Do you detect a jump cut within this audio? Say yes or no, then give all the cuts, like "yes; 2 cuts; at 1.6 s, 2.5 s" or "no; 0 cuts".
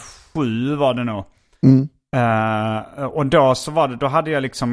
no; 0 cuts